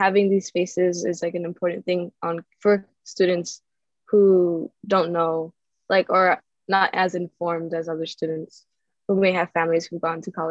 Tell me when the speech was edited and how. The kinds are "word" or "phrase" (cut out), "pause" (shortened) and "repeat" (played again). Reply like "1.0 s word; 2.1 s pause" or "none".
none